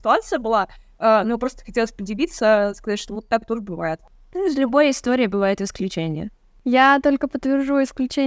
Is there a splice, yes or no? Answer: no